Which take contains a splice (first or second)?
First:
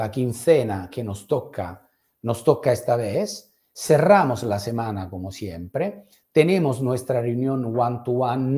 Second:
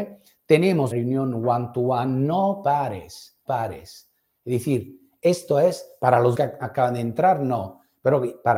second